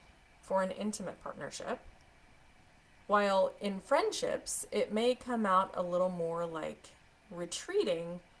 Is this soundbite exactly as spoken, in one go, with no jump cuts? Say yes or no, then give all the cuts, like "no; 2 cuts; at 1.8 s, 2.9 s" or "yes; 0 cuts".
yes; 0 cuts